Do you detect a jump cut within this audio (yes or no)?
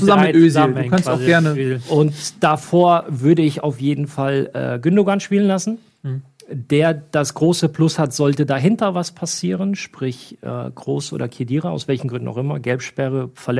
no